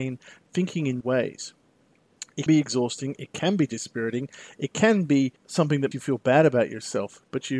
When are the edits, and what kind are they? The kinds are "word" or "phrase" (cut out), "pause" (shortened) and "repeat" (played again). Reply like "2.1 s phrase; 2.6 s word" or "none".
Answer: 1.0 s word; 2.5 s word; 5.4 s pause; 5.9 s word